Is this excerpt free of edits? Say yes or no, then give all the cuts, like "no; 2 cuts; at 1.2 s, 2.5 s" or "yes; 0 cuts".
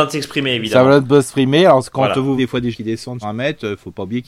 no; 3 cuts; at 2.4 s, 2.7 s, 3.2 s